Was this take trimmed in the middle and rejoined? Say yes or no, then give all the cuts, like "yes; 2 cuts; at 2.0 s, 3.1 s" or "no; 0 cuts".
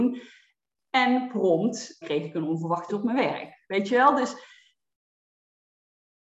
yes; 2 cuts; at 2.0 s, 2.9 s